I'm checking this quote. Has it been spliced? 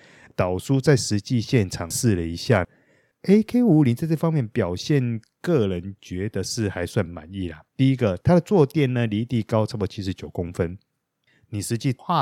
yes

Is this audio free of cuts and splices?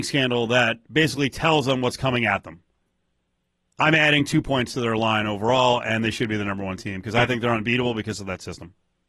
yes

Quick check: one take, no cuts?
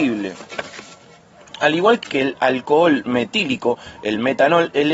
no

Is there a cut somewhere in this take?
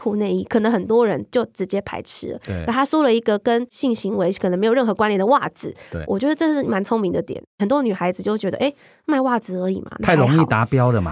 no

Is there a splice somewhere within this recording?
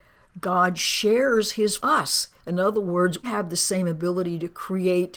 yes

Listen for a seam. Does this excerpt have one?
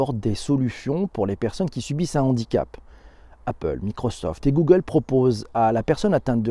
no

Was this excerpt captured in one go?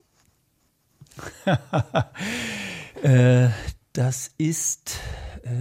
yes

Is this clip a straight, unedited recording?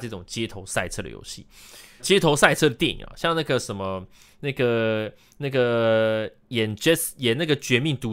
no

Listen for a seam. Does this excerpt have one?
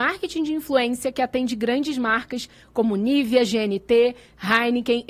no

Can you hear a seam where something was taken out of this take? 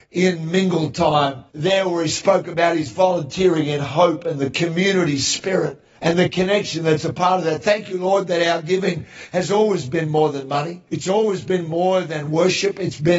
yes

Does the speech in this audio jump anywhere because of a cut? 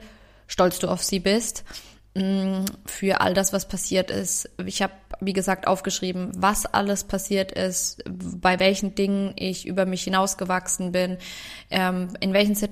no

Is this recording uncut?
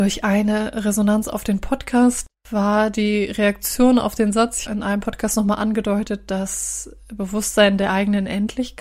no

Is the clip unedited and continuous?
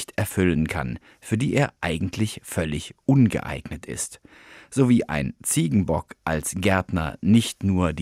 yes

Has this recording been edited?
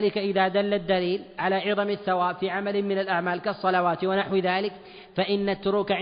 no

